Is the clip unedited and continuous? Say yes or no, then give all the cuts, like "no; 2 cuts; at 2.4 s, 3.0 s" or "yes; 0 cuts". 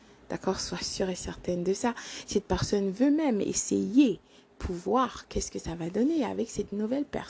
yes; 0 cuts